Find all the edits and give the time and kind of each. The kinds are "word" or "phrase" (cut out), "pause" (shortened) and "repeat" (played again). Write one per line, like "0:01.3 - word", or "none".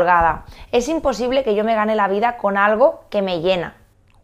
none